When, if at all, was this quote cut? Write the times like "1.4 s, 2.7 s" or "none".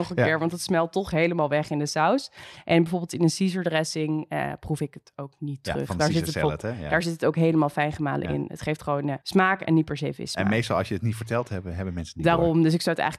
9.2 s